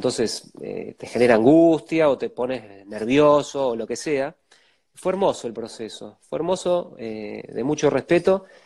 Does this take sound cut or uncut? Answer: uncut